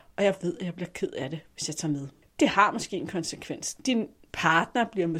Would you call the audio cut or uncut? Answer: uncut